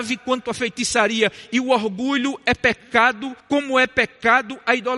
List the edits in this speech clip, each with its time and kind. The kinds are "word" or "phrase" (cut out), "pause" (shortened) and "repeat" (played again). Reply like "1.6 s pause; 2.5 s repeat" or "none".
3.4 s pause